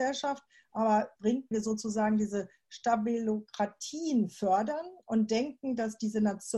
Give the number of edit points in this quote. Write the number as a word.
two